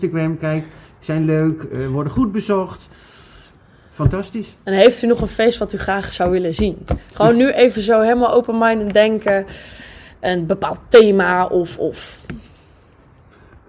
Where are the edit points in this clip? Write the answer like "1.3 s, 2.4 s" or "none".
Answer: none